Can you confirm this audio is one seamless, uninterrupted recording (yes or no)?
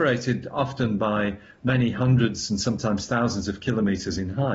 yes